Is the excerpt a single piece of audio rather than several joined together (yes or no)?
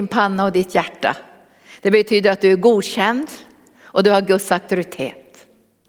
yes